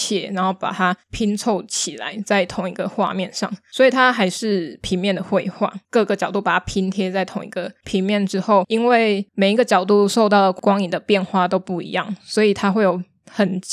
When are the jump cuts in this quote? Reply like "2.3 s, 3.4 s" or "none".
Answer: 1.0 s, 5.8 s, 9.3 s